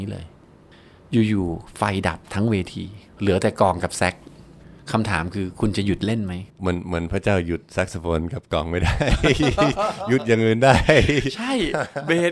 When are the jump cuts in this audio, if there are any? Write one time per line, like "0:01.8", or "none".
0:03.1
0:06.5